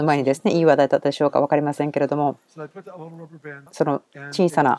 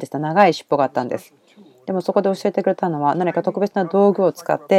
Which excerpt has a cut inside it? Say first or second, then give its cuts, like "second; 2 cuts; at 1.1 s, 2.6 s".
first; 1 cut; at 3.7 s